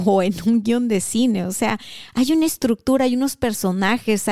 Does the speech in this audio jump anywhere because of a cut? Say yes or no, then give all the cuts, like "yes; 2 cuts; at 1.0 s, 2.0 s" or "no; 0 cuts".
no; 0 cuts